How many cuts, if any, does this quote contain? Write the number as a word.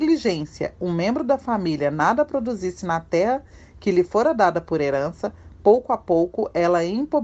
zero